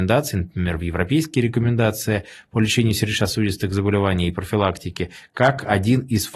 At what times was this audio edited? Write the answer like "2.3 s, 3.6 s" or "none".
none